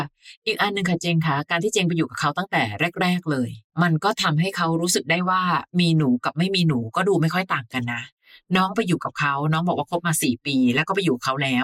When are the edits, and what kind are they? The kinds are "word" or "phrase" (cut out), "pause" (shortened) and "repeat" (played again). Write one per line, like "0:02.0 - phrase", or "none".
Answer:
none